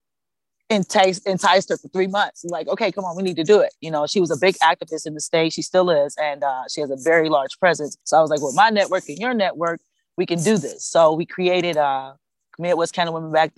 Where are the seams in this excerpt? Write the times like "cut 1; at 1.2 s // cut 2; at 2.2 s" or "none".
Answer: cut 1; at 8.0 s